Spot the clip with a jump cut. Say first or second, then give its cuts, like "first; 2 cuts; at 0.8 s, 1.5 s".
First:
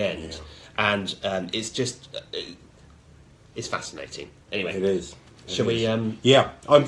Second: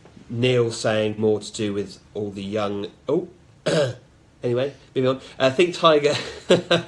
second; 1 cut; at 1.2 s